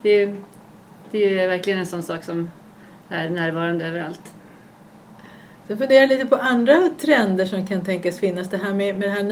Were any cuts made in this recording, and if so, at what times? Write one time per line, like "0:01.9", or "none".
none